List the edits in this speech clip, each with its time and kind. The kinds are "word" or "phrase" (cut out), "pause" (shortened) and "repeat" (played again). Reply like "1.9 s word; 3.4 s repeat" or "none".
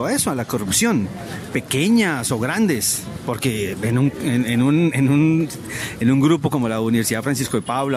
none

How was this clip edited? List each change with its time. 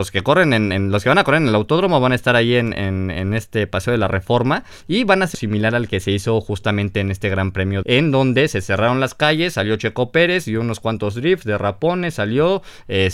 5.3 s phrase; 7.8 s phrase

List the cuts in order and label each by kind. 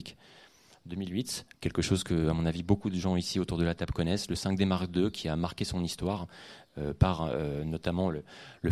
1.5 s pause

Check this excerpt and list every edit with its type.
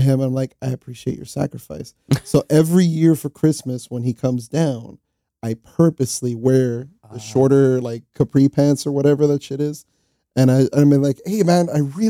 none

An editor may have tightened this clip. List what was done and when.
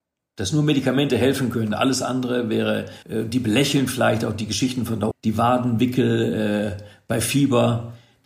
3.0 s pause; 5.1 s word

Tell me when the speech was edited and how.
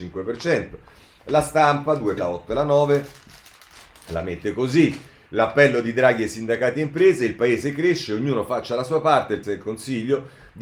2.2 s word; 9.4 s word

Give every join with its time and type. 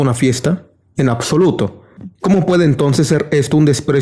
2.1 s pause

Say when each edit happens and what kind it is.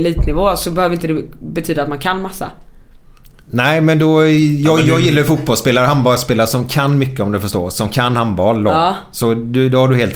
none

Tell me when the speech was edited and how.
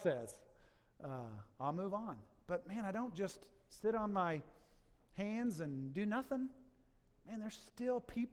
none

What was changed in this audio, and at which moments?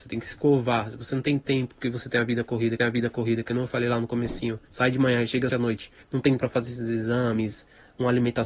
2.8 s repeat; 4.6 s pause; 5.5 s word; 6.0 s pause; 6.4 s word

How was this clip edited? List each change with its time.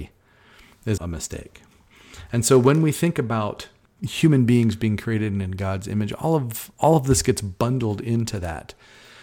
1.0 s word

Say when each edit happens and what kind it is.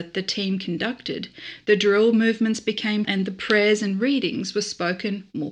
3.0 s word

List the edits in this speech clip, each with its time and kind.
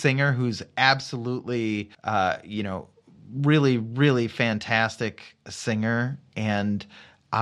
1.9 s pause

